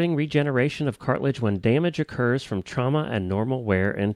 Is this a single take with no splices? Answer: yes; 0 cuts

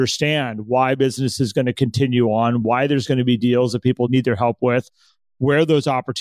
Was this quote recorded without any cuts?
yes; 0 cuts

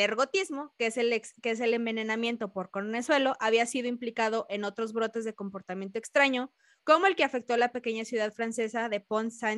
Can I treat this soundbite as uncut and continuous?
yes; 0 cuts

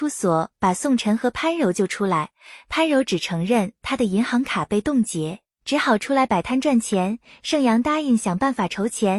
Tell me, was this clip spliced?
no; 0 cuts

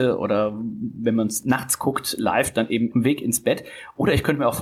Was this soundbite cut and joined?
yes; 1 cut; at 2.9 s

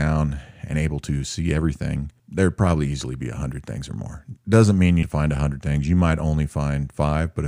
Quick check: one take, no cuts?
no; 3 cuts; at 2.2 s, 4.4 s, 5.0 s

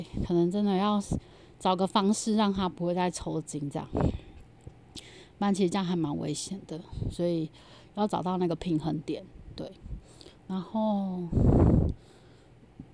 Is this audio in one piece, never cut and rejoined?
yes; 0 cuts

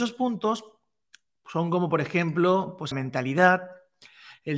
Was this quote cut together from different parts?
yes; 1 cut; at 2.9 s

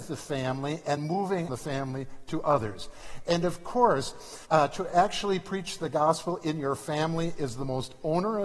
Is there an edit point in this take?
yes; 3 cuts; at 1.0 s, 1.5 s, 4.4 s

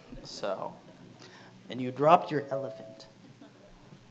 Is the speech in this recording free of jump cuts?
yes; 0 cuts

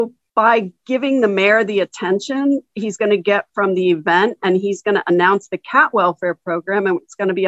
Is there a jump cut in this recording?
no; 0 cuts

